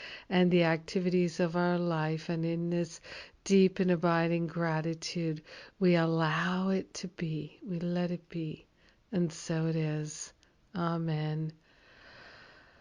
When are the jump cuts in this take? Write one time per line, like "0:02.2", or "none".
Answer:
none